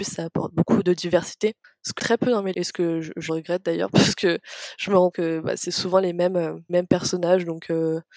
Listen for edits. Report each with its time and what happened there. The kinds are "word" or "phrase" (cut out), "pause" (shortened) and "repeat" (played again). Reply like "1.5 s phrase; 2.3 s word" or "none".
2.0 s word; 2.5 s word; 3.3 s phrase; 5.1 s word; 6.7 s word